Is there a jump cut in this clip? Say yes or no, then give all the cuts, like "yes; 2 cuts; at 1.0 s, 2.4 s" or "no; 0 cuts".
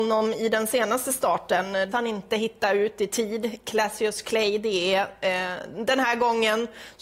yes; 1 cut; at 1.9 s